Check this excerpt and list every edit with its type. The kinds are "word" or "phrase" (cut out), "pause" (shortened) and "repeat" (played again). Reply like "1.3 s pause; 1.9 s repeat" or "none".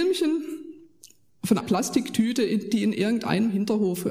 1.6 s word